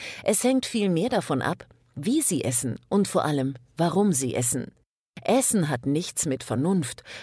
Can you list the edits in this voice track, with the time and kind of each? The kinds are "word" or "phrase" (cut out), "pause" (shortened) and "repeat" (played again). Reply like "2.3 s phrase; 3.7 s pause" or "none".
none